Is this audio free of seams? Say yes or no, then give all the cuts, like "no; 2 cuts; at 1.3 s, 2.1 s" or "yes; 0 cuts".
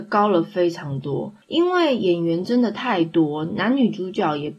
no; 1 cut; at 1.4 s